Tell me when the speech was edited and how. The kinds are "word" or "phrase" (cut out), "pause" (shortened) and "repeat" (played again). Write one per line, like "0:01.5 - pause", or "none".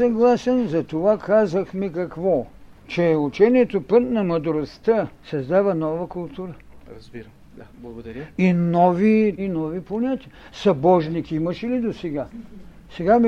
0:02.7 - pause
0:05.2 - pause
0:07.7 - pause
0:09.4 - word